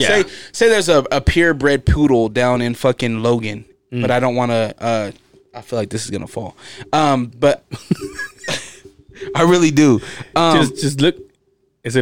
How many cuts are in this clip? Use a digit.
0